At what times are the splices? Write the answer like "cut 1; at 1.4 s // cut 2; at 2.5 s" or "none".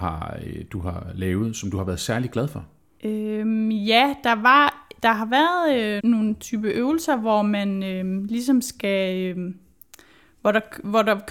cut 1; at 6.0 s